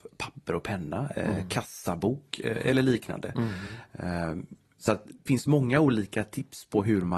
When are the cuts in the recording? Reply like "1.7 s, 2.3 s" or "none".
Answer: 5.3 s

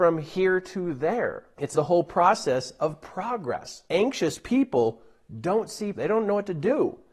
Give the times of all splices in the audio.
1.7 s, 5.9 s

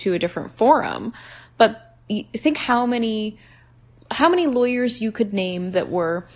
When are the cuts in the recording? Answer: 2.5 s

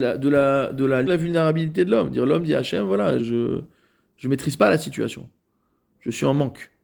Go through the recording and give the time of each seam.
1.1 s, 3.2 s

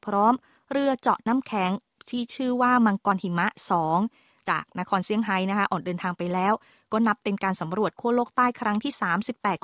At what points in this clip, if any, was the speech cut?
none

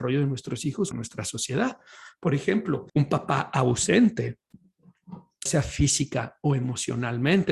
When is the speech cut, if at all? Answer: 0.9 s, 2.9 s, 5.5 s

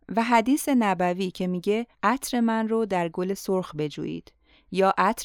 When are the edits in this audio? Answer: 1.9 s

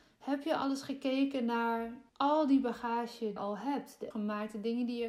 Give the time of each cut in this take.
2.1 s, 3.4 s, 4.1 s

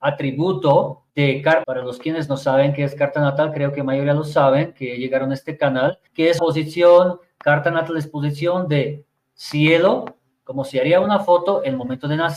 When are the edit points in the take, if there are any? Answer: 1.1 s, 1.6 s, 6.1 s, 6.4 s

